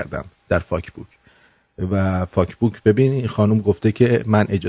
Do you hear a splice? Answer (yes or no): no